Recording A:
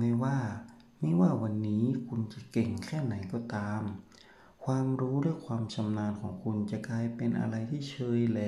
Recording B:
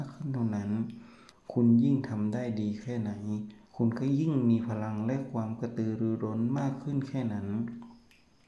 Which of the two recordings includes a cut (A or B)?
B